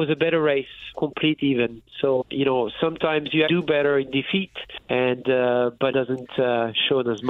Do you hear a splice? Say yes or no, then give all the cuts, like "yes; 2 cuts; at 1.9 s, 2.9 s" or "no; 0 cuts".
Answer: yes; 6 cuts; at 0.9 s, 2.2 s, 3.5 s, 4.8 s, 5.9 s, 6.3 s